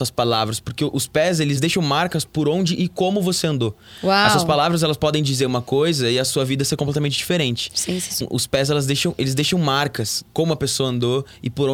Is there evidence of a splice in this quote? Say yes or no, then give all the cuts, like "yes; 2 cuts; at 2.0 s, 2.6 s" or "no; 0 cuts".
yes; 1 cut; at 8.2 s